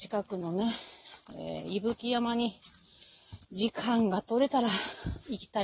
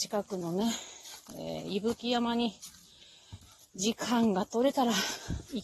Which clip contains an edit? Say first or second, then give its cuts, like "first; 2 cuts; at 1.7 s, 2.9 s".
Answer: first; 1 cut; at 3.4 s